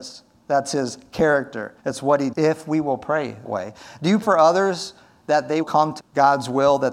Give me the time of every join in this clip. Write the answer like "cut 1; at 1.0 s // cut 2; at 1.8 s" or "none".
cut 1; at 1.8 s // cut 2; at 2.3 s // cut 3; at 3.4 s // cut 4; at 4.2 s // cut 5; at 5.6 s // cut 6; at 6.0 s

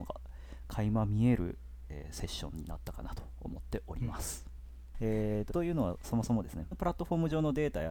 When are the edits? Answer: cut 1; at 5.5 s // cut 2; at 6.7 s

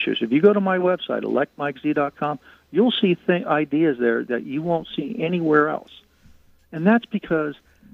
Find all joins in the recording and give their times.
none

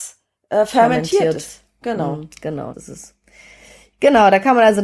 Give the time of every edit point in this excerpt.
cut 1; at 2.7 s

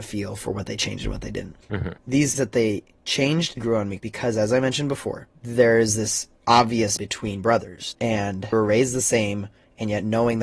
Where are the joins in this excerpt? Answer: cut 1; at 2.4 s // cut 2; at 3.6 s // cut 3; at 4.0 s // cut 4; at 5.4 s // cut 5; at 7.0 s // cut 6; at 8.5 s

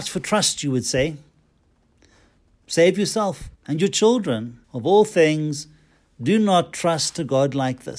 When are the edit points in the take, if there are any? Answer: cut 1; at 3.6 s // cut 2; at 4.6 s

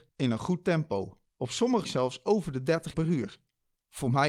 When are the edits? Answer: cut 1; at 1.3 s // cut 2; at 1.8 s // cut 3; at 2.9 s

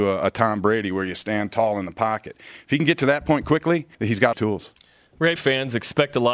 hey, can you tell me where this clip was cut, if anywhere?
cut 1; at 3.9 s // cut 2; at 4.3 s // cut 3; at 5.4 s

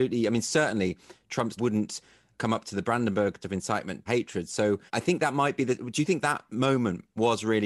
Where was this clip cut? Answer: cut 1; at 1.6 s // cut 2; at 2.3 s // cut 3; at 3.4 s // cut 4; at 4.1 s // cut 5; at 4.9 s // cut 6; at 6.2 s

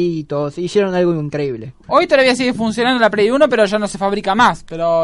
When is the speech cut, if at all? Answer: none

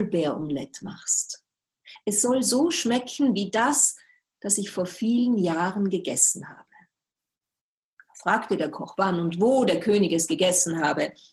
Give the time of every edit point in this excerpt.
none

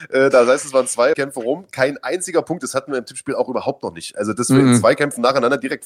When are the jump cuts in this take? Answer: cut 1; at 1.1 s

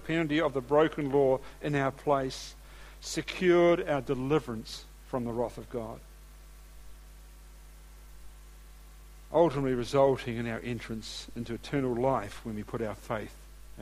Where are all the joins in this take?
none

